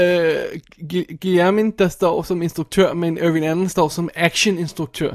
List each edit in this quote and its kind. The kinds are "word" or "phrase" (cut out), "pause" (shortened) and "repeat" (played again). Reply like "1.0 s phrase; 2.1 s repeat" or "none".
none